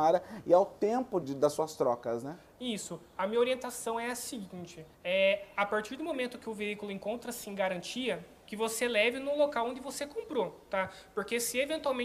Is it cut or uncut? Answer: cut